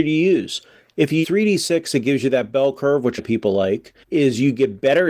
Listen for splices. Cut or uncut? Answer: cut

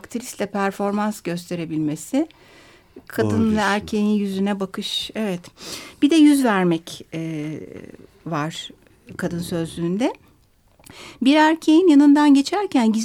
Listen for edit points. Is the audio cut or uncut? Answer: uncut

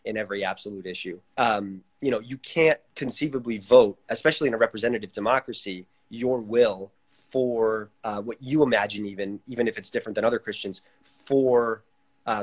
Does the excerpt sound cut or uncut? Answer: cut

